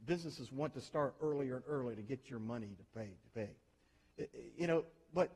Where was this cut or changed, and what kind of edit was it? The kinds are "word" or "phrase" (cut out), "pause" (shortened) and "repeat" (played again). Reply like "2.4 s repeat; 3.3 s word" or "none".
none